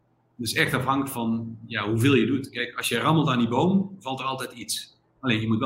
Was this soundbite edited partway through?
no; 0 cuts

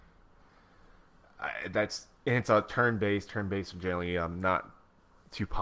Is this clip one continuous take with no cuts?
yes; 0 cuts

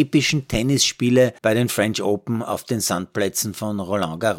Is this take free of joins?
no; 1 cut; at 1.4 s

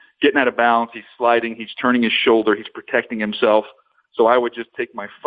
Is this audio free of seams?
yes; 0 cuts

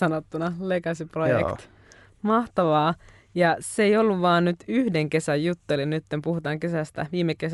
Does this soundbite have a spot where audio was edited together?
no; 0 cuts

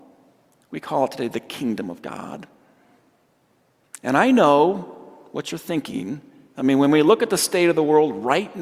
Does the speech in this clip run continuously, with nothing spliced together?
yes; 0 cuts

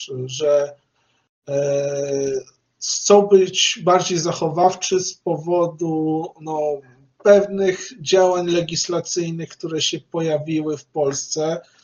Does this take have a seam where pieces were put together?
no; 0 cuts

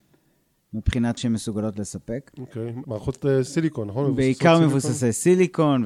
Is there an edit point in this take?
yes; 2 cuts; at 1.2 s, 2.8 s

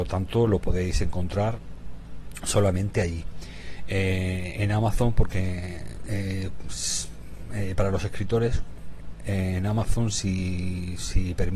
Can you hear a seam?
no; 0 cuts

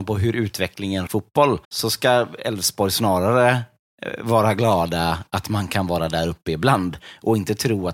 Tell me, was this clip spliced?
yes; 2 cuts; at 1.1 s, 1.6 s

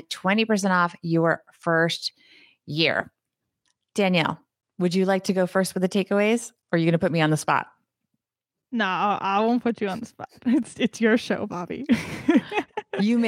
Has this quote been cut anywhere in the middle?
no; 0 cuts

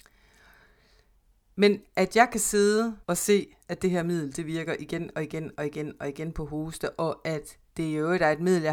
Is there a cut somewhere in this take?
yes; 2 cuts; at 3.0 s, 7.7 s

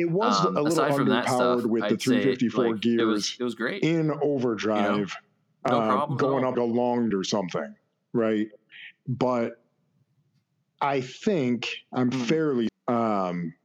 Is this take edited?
yes; 3 cuts; at 6.5 s, 7.1 s, 12.7 s

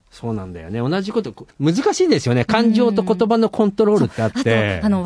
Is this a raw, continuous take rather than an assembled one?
no; 1 cut; at 1.5 s

